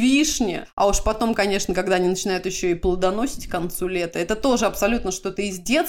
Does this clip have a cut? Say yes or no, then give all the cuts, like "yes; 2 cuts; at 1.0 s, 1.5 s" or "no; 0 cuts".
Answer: no; 0 cuts